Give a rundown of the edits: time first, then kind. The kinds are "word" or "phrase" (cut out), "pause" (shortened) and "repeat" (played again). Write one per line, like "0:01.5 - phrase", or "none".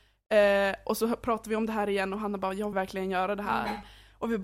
0:02.7 - word

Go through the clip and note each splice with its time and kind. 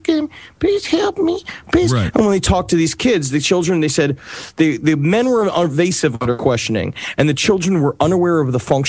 none

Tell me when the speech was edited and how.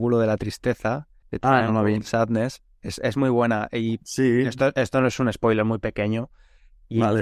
0:01.2 - pause

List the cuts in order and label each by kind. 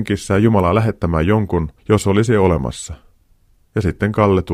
0:01.8 - pause

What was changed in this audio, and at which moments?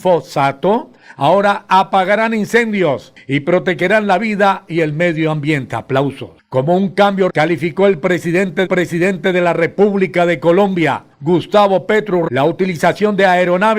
0:07.3 - word
0:08.7 - repeat
0:12.3 - word

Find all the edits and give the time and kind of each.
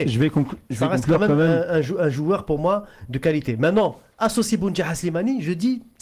none

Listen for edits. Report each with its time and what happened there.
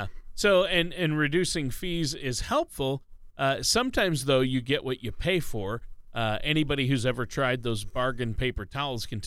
none

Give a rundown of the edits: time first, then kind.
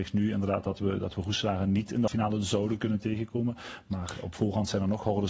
0:02.1 - word

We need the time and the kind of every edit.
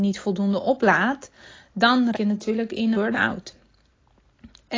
0:02.1 - word
0:02.9 - word

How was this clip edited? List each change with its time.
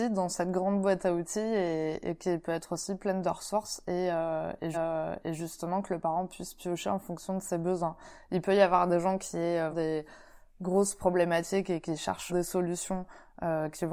0:04.7 - repeat
0:09.7 - word
0:12.3 - word

